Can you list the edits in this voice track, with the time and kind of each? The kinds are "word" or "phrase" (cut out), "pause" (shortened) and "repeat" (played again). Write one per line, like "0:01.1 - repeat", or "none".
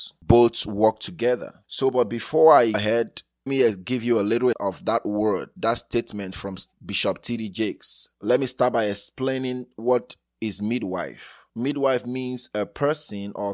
0:02.7 - word
0:03.5 - word
0:04.5 - word
0:06.7 - word